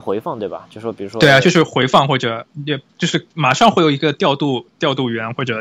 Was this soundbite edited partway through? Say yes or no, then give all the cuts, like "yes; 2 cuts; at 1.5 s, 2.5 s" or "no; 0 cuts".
yes; 1 cut; at 2.9 s